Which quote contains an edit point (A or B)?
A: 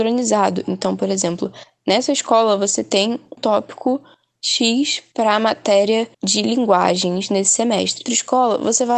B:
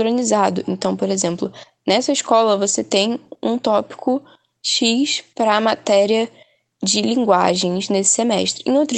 A